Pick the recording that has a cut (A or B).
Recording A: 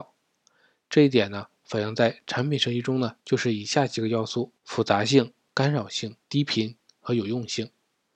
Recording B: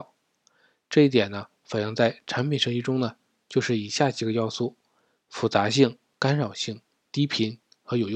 A